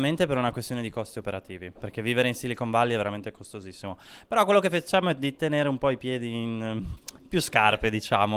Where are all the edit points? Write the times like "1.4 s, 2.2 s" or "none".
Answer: none